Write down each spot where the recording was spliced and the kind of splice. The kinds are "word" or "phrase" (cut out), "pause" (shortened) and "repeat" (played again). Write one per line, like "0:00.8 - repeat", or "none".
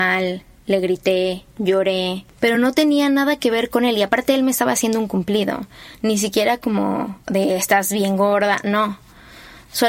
none